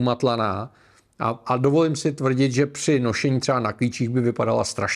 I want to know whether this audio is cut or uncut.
uncut